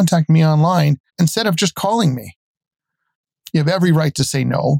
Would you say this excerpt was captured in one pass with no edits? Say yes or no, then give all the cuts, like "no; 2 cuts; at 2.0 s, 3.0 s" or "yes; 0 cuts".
no; 1 cut; at 1.1 s